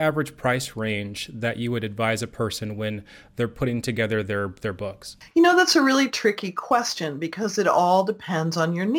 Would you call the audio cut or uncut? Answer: uncut